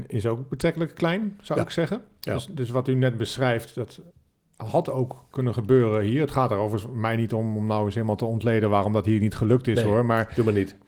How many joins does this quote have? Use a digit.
0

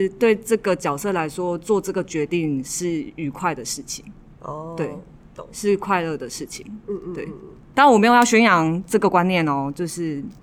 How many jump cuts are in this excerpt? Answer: 0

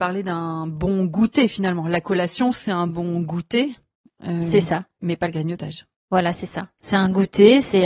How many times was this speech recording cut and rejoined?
0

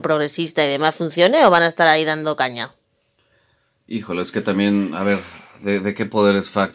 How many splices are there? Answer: 0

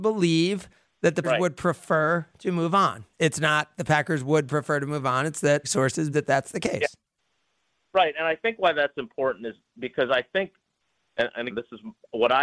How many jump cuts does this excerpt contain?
4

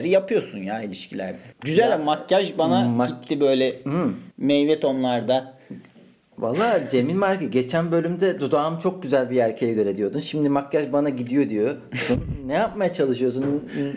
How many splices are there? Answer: 2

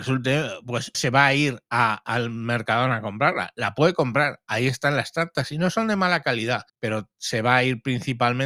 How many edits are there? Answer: 3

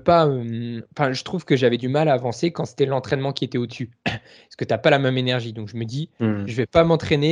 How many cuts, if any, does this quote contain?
0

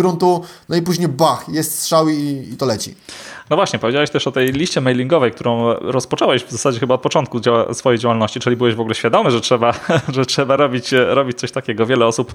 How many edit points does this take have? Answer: 0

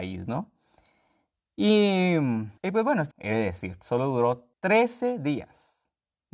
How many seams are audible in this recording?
3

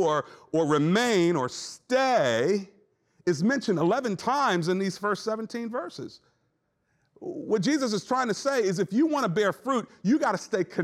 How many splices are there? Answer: 0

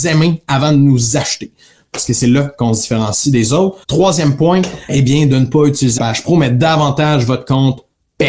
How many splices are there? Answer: 3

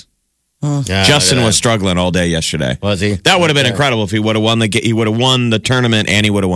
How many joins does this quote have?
0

